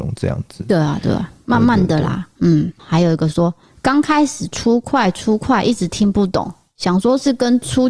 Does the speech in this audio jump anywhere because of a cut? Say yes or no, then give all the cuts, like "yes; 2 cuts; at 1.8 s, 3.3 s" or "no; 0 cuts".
yes; 1 cut; at 2.8 s